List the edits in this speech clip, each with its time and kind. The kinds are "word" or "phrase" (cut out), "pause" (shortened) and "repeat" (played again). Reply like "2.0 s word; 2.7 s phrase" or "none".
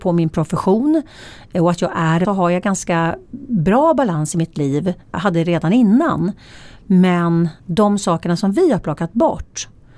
2.2 s phrase; 5.0 s pause; 7.6 s pause